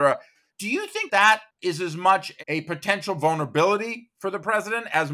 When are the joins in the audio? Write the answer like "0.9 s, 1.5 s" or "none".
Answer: 1.1 s, 1.5 s